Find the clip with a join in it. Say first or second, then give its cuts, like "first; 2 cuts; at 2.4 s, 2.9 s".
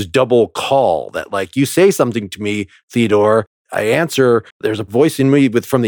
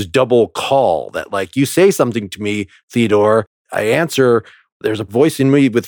first; 1 cut; at 4.5 s